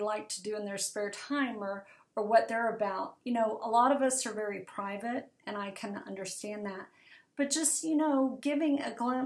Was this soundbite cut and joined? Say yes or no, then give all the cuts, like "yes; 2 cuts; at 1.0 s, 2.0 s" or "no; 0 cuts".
no; 0 cuts